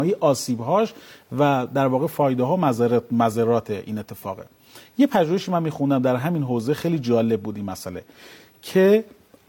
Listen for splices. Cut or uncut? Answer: uncut